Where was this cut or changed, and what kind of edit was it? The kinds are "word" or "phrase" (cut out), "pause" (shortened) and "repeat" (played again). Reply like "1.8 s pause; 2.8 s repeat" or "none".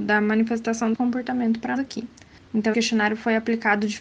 0.9 s word; 1.8 s word; 2.7 s word